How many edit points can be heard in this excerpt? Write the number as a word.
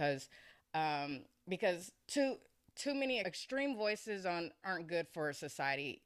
three